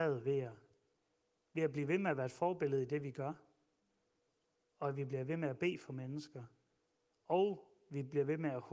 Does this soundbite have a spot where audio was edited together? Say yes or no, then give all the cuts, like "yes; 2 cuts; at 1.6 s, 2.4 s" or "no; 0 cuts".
no; 0 cuts